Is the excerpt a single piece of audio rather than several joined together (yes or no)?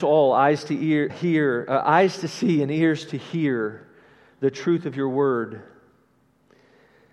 no